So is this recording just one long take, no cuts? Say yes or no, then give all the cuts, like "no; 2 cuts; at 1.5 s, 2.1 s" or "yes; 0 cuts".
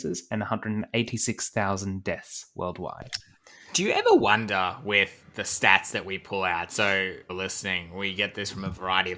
no; 1 cut; at 7.3 s